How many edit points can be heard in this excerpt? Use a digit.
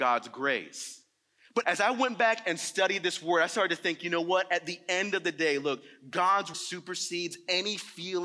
2